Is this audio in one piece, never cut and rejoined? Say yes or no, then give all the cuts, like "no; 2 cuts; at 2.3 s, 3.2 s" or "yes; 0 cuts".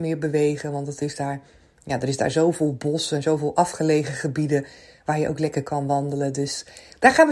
yes; 0 cuts